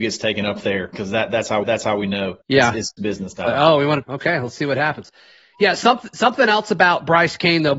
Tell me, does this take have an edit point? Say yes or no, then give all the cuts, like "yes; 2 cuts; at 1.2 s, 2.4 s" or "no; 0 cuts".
yes; 4 cuts; at 1.6 s, 2.4 s, 3.0 s, 4.0 s